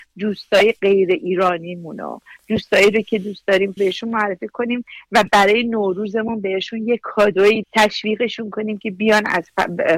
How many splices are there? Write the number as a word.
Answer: two